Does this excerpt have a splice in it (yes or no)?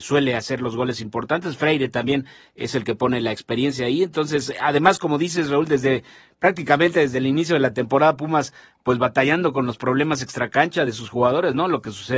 no